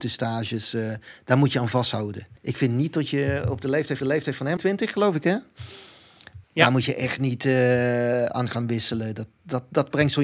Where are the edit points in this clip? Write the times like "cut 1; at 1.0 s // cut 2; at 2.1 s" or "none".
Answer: cut 1; at 2.4 s // cut 2; at 4.0 s // cut 3; at 4.6 s // cut 4; at 6.4 s